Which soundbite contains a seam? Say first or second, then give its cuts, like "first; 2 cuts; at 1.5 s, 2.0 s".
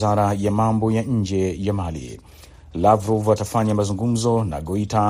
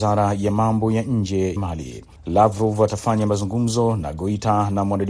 second; 2 cuts; at 1.6 s, 2.2 s